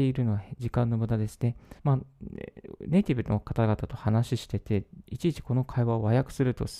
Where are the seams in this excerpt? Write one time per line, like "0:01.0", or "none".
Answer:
0:01.8